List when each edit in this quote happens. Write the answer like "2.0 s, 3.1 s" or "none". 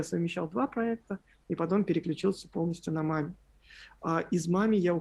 none